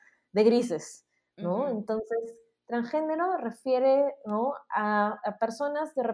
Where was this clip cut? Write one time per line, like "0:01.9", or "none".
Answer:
none